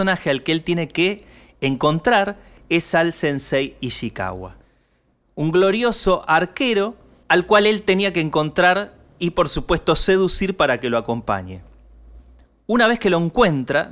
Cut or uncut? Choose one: uncut